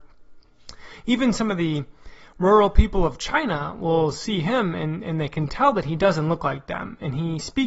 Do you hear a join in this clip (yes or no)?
no